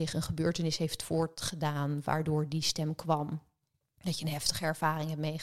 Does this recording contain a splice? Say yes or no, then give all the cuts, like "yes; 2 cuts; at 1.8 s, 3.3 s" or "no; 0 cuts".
no; 0 cuts